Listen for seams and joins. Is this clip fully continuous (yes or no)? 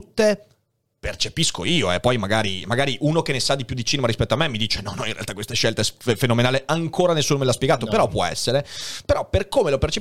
yes